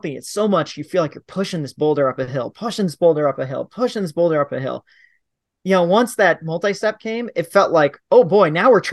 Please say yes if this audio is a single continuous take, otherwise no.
yes